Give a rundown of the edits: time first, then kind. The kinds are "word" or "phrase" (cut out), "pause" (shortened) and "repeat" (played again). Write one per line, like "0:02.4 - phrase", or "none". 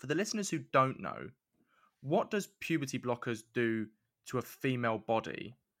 none

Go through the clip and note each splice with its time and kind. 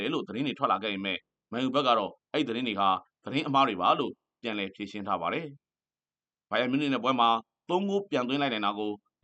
none

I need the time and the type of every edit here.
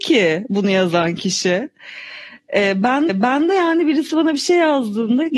0:03.1 - repeat

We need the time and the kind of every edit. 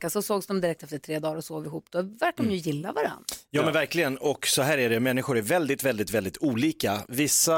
none

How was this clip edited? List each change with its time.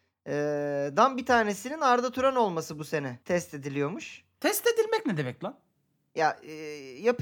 0:03.2 - pause

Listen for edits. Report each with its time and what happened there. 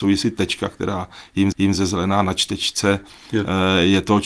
0:01.5 - repeat

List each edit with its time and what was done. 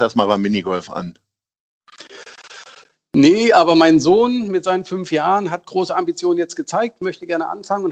none

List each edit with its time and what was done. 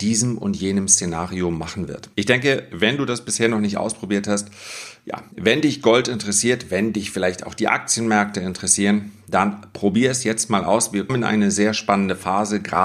0:02.1 - pause
0:05.3 - pause
0:11.1 - word

